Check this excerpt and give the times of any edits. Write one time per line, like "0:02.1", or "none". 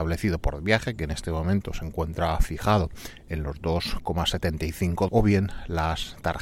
0:05.1